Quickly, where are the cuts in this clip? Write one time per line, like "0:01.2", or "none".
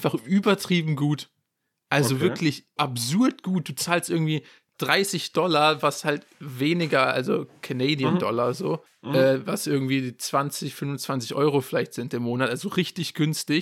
0:02.8
0:06.3
0:08.9

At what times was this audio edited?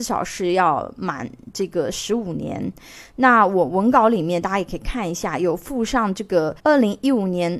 0:06.6

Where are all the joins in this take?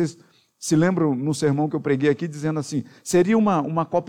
none

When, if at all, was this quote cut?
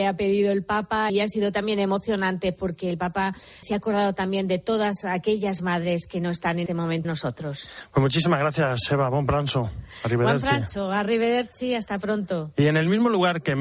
0:01.1
0:03.6
0:06.7
0:07.0

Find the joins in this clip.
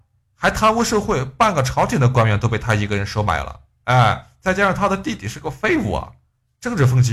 none

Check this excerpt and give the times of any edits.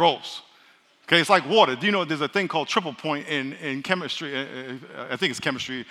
none

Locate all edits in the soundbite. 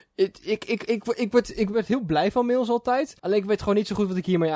0:03.2

